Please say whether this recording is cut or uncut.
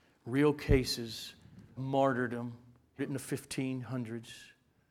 cut